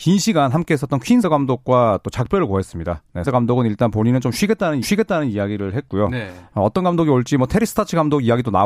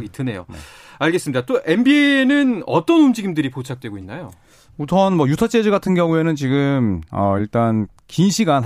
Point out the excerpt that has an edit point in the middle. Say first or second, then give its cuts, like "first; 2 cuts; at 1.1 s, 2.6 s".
first; 3 cuts; at 1.2 s, 3.2 s, 4.8 s